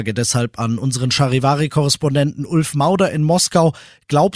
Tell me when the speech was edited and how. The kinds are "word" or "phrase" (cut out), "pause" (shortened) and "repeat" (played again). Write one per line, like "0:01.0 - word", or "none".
none